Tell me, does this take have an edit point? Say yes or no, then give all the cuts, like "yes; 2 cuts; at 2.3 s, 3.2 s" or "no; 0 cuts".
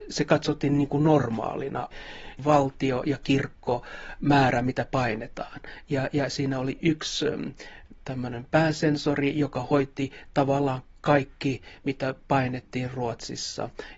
no; 0 cuts